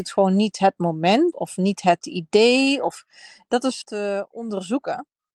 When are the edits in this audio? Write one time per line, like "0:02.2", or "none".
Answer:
0:01.3
0:02.0
0:03.8